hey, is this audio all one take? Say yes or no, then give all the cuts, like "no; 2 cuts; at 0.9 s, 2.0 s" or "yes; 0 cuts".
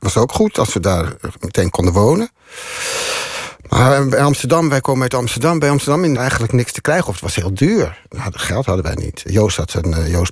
no; 2 cuts; at 1.7 s, 6.2 s